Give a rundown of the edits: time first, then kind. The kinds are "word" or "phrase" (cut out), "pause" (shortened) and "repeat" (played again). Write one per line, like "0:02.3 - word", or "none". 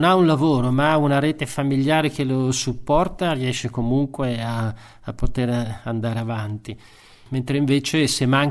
none